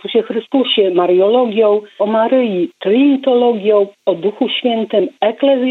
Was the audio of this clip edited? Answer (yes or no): yes